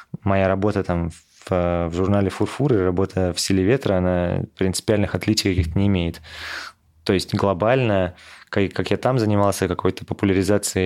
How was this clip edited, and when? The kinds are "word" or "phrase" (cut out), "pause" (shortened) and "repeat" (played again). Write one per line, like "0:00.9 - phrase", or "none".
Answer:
none